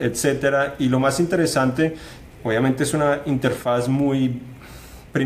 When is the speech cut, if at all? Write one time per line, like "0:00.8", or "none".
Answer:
0:02.4